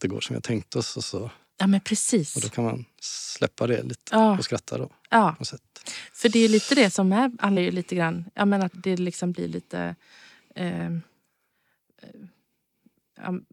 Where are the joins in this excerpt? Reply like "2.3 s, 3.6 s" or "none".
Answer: 4.1 s, 7.6 s, 8.7 s

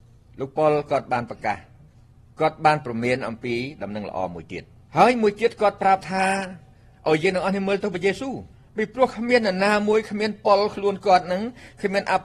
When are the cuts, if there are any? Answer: 8.5 s

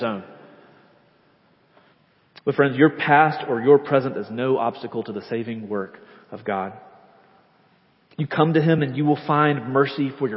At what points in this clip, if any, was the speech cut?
none

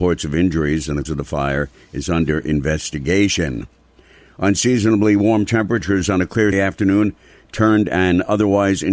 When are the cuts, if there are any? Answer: 1.0 s, 6.5 s

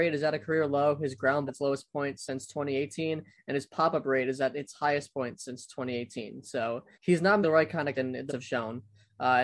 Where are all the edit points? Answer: 1.5 s, 6.9 s, 7.4 s, 7.9 s, 8.3 s

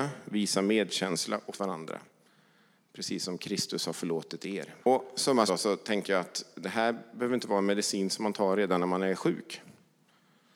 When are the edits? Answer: 1.5 s, 4.8 s, 5.5 s

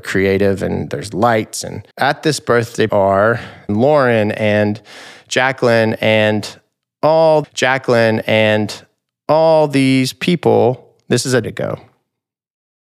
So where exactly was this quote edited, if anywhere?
1.9 s, 2.9 s, 3.7 s, 7.4 s, 11.4 s

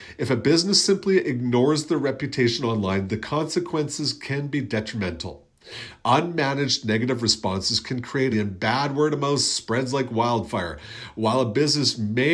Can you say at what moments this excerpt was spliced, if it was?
8.3 s

